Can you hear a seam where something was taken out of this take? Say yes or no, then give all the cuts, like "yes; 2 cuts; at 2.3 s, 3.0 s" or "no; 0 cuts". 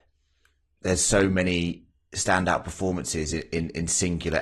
no; 0 cuts